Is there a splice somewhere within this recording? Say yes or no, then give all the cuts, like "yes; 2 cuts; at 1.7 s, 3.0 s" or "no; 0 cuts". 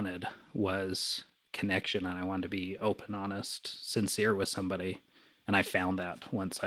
no; 0 cuts